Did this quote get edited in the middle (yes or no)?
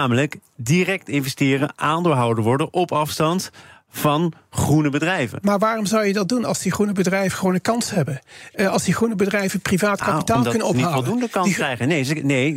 no